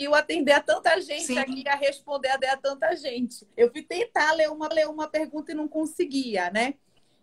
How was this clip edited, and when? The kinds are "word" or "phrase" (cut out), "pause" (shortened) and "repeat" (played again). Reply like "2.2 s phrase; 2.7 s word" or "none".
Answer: 2.4 s repeat; 3.5 s pause; 4.7 s repeat